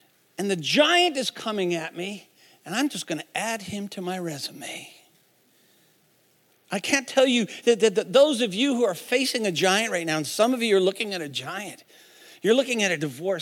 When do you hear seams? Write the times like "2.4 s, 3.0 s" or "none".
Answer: none